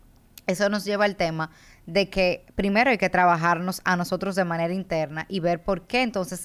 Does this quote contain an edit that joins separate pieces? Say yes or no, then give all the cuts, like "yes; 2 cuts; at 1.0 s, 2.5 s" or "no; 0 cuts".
no; 0 cuts